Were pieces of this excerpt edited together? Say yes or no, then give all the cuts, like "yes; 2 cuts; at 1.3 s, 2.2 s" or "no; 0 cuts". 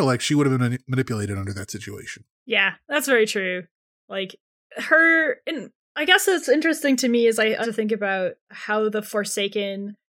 yes; 1 cut; at 7.6 s